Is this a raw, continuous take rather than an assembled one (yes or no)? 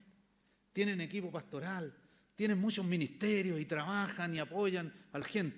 yes